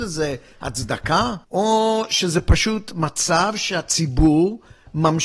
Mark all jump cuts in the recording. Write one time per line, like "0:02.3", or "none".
0:01.4